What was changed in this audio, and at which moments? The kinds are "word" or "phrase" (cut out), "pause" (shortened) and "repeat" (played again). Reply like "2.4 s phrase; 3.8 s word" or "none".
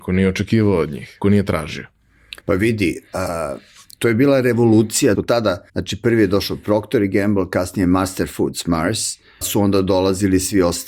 1.2 s word; 2.4 s pause; 5.1 s phrase; 5.7 s pause; 9.4 s word